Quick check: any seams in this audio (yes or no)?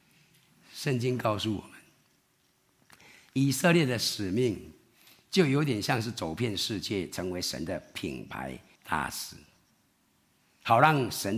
yes